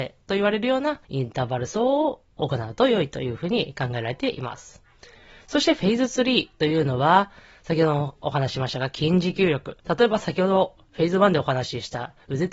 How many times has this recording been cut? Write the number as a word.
two